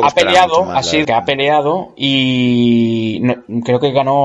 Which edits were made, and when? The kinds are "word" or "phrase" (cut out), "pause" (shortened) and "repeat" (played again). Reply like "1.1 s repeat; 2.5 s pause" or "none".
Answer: 1.0 s phrase